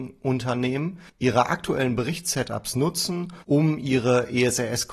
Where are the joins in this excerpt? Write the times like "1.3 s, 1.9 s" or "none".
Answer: 1.1 s, 3.4 s